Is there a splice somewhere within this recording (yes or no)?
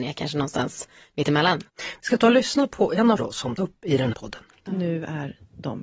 yes